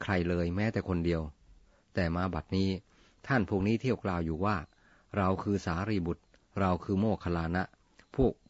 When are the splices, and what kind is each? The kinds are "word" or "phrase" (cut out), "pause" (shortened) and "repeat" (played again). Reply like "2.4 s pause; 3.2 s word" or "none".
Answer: none